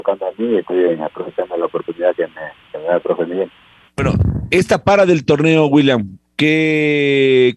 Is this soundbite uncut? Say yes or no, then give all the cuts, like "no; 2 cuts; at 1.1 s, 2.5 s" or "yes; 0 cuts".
yes; 0 cuts